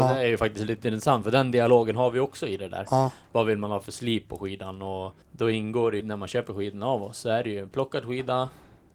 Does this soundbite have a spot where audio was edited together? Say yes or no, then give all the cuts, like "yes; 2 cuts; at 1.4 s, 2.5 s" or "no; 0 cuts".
yes; 2 cuts; at 5.2 s, 6.0 s